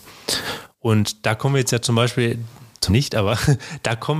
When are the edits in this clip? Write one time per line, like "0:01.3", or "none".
0:02.9